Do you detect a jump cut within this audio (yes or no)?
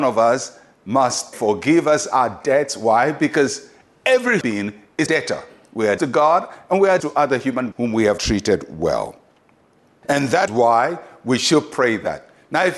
yes